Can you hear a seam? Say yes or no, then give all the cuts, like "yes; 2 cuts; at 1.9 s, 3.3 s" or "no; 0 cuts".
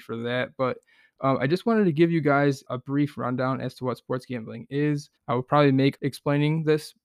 yes; 3 cuts; at 2.7 s, 5.2 s, 6.0 s